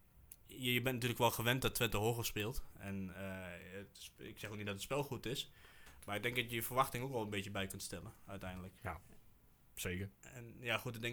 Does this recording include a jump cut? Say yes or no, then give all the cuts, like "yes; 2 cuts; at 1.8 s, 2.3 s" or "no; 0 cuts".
yes; 2 cuts; at 8.8 s, 10.1 s